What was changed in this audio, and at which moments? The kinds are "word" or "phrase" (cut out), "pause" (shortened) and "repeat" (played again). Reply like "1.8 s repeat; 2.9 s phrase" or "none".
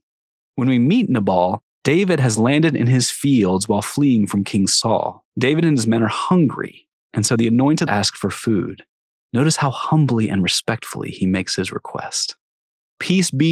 5.3 s pause; 7.9 s phrase